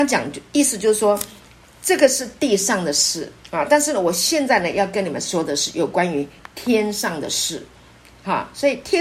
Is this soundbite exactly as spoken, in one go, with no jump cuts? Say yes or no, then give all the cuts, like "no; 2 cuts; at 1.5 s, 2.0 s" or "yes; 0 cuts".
no; 1 cut; at 3.4 s